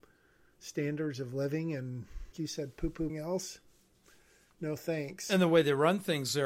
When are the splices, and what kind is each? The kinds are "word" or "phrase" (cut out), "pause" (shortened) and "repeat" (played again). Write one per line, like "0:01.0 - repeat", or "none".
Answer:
0:02.3 - word
0:03.1 - phrase